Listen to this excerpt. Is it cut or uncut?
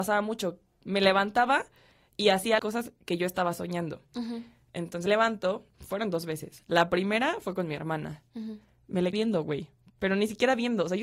cut